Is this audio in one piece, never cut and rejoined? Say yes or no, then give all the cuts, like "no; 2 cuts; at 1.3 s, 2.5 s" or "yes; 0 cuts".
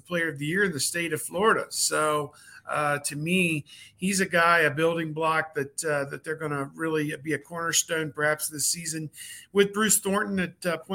yes; 0 cuts